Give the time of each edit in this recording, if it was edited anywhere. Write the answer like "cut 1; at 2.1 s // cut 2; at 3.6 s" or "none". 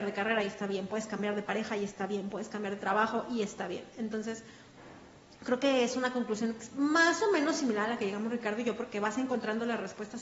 none